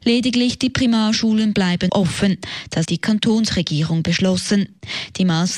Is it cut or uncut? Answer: cut